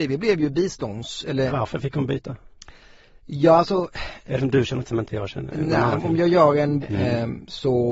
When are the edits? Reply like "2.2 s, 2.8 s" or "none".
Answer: 1.5 s, 4.4 s, 4.9 s, 6.0 s, 6.8 s